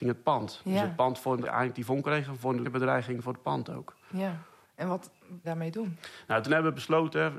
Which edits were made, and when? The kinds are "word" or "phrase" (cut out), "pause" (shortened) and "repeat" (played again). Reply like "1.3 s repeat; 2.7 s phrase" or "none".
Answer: 1.4 s word; 2.6 s phrase; 4.6 s pause; 5.4 s phrase